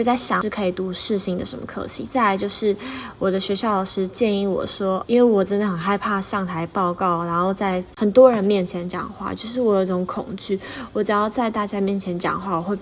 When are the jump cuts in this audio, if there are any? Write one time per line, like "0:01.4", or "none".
0:05.0